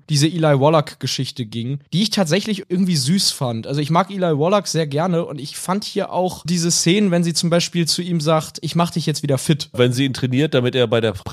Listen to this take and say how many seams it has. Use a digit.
1